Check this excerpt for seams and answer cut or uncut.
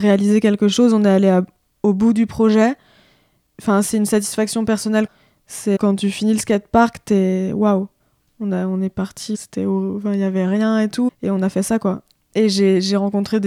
cut